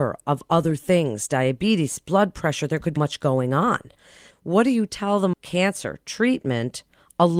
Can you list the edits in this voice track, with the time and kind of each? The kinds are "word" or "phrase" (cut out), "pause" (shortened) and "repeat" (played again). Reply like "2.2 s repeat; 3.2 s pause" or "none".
3.0 s word; 4.3 s word; 5.3 s word